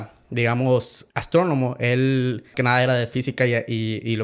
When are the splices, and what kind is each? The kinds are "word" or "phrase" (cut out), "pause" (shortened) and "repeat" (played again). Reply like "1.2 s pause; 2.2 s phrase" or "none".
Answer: 1.1 s pause; 2.5 s word